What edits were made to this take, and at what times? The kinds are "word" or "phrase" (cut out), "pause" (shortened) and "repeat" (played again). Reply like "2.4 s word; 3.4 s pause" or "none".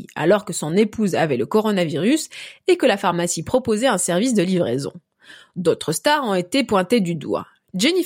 none